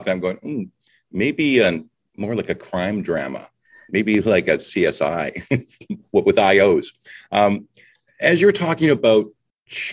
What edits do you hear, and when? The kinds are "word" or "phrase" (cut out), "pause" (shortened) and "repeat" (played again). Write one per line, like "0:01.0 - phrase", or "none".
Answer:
none